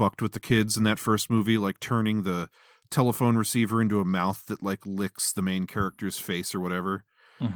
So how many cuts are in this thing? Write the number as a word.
zero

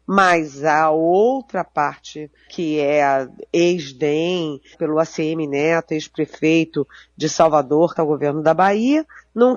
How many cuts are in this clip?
three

